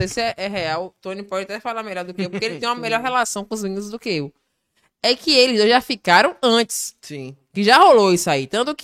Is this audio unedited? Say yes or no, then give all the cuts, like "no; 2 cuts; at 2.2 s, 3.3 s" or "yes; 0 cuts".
yes; 0 cuts